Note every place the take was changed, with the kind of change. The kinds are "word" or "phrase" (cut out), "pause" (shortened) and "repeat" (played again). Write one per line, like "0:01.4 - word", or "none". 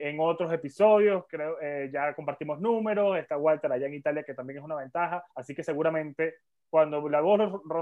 0:05.3 - pause

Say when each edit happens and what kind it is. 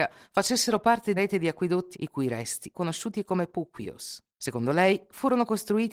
0:01.2 - word
0:01.9 - word
0:02.7 - word
0:04.3 - pause

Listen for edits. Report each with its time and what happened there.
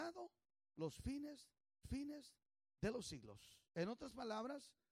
0:01.8 - repeat
0:03.7 - pause

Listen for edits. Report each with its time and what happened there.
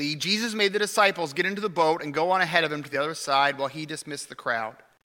none

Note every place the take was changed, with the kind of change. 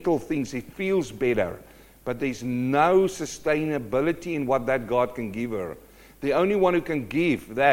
none

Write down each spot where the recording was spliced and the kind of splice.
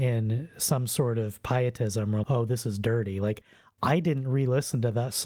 0:02.2 - word

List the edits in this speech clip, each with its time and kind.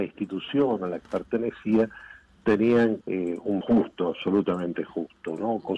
0:01.0 - word
0:03.0 - phrase
0:03.6 - word

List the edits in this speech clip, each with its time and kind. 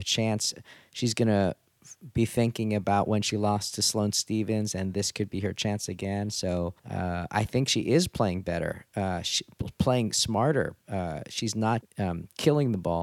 0:06.8 - pause
0:11.8 - word

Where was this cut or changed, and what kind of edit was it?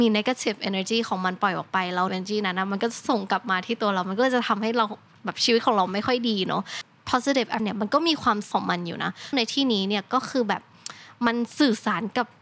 0:02.1 - word
0:07.6 - word
0:08.5 - word
0:09.3 - word

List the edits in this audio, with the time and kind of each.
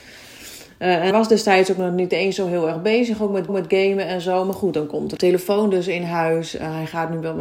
0:01.1 - word
0:03.5 - repeat
0:05.2 - word

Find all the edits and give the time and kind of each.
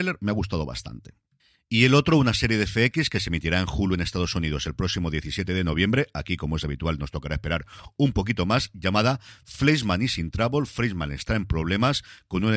none

